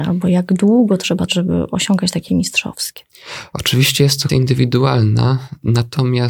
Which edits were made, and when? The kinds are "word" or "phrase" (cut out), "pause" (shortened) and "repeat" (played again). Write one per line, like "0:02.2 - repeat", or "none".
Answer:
0:01.3 - word
0:02.3 - word
0:04.3 - word